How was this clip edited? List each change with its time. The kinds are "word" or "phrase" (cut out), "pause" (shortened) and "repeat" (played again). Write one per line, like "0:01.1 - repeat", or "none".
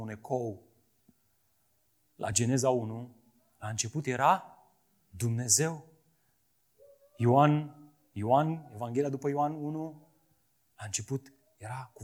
none